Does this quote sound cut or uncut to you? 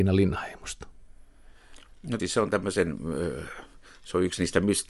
cut